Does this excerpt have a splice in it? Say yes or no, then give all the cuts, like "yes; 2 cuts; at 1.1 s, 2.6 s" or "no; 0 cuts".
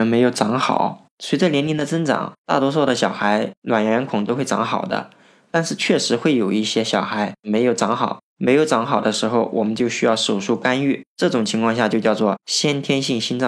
no; 0 cuts